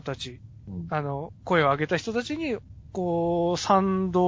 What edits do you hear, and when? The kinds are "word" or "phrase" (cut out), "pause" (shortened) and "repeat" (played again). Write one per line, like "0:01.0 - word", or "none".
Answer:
0:01.4 - pause